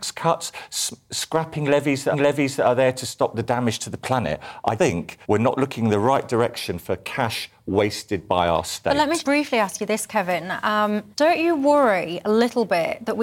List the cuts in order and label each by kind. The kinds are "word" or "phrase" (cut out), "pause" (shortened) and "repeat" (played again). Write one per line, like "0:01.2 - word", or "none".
0:02.1 - repeat
0:04.8 - word
0:05.2 - pause
0:09.2 - word
0:11.1 - pause